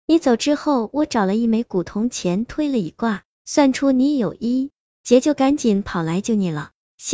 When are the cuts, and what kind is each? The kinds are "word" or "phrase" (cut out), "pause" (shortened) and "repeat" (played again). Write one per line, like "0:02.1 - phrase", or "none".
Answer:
none

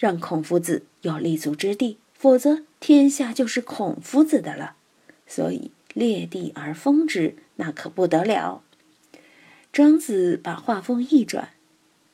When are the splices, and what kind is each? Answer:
0:02.1 - pause

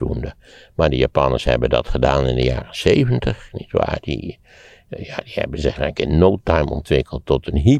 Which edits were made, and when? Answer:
none

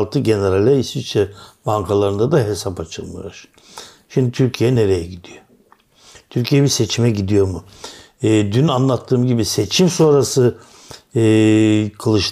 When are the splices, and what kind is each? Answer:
none

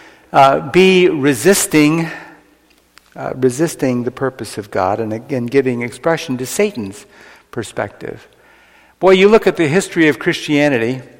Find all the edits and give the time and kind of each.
none

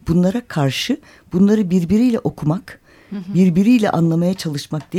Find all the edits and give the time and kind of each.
none

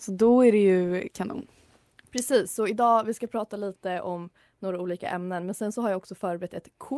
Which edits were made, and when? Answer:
none

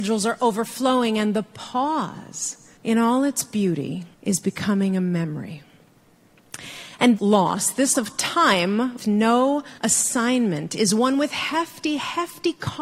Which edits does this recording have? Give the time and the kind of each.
0:02.8 - pause
0:04.1 - pause
0:07.2 - word
0:07.9 - word
0:09.0 - word
0:09.8 - pause

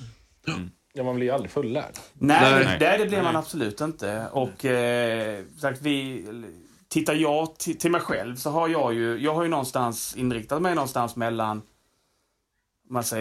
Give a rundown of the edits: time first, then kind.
0:05.5 - pause

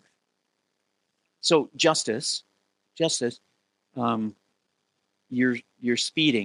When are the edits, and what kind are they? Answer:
none

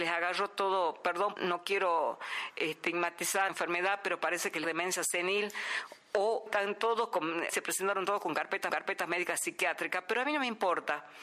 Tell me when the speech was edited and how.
0:01.4 - word
0:03.5 - word
0:04.6 - word
0:06.5 - word
0:07.5 - word
0:08.7 - repeat

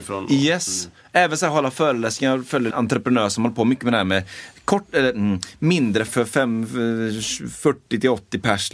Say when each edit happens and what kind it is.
0:02.7 - word
0:06.1 - word

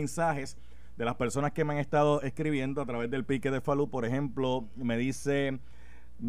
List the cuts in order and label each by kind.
none

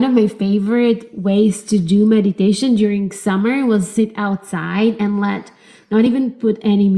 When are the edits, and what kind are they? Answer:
none

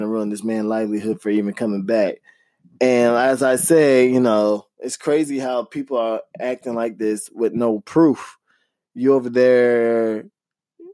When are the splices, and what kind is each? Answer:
none

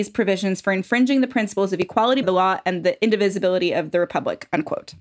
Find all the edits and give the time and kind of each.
0:02.2 - word

